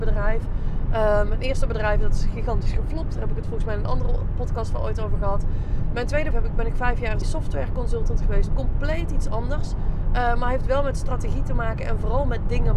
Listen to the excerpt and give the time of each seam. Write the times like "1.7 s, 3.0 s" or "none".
6.3 s, 7.2 s